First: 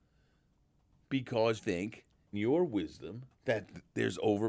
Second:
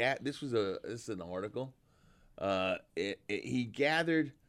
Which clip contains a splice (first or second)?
first